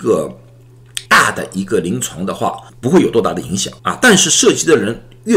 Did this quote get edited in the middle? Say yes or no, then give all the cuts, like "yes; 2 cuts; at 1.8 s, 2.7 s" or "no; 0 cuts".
yes; 3 cuts; at 1.1 s, 2.7 s, 3.8 s